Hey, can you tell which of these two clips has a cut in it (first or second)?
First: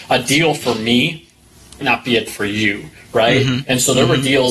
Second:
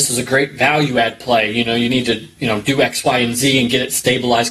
first